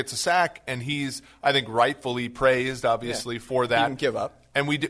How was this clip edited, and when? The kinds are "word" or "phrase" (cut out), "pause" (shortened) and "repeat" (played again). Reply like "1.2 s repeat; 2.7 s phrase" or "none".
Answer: none